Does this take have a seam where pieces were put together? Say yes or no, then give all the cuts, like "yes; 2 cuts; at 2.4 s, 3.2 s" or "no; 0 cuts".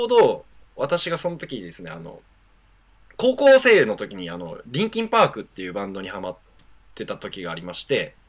no; 0 cuts